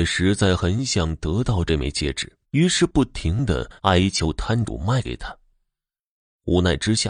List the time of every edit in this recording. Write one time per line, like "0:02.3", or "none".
0:02.4
0:03.8